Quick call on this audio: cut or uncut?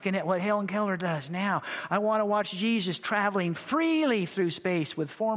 uncut